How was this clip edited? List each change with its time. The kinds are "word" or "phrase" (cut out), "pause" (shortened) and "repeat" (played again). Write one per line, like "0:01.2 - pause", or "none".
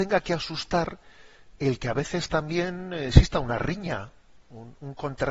none